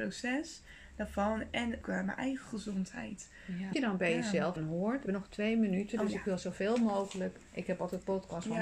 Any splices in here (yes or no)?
yes